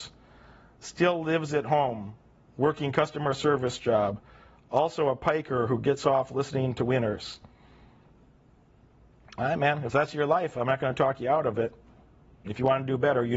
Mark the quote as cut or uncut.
uncut